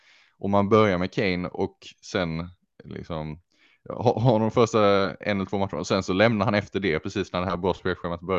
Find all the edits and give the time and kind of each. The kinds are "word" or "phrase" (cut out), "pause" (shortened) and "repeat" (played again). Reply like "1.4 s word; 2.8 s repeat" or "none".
none